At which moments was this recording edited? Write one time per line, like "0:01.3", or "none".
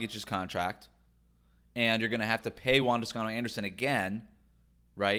none

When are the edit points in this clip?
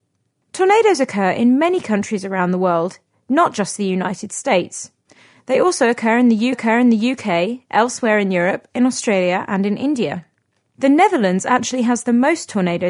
0:06.5

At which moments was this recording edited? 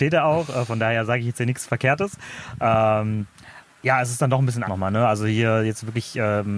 0:03.6
0:04.6

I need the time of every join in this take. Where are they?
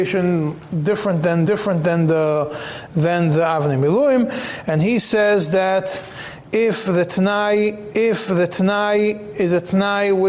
0:01.5
0:07.9

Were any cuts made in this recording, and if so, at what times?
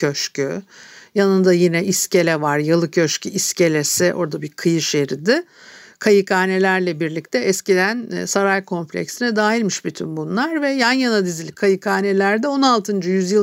none

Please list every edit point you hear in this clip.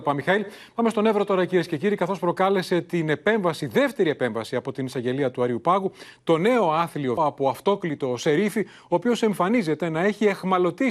0:07.2

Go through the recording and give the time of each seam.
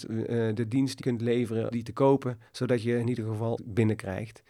0:01.0
0:01.7
0:02.5
0:03.6

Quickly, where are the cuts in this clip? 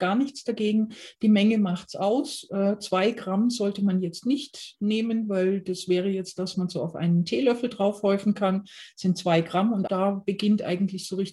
0:06.5
0:09.9

